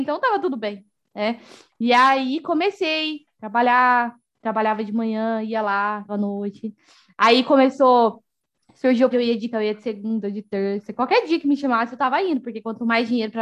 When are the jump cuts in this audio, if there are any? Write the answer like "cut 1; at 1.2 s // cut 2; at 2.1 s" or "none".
cut 1; at 6.1 s // cut 2; at 9.1 s // cut 3; at 9.5 s